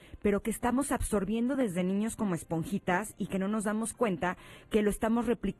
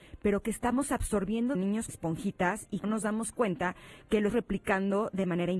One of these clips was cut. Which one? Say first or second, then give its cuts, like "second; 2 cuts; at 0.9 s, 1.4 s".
second; 4 cuts; at 1.5 s, 1.9 s, 2.8 s, 4.3 s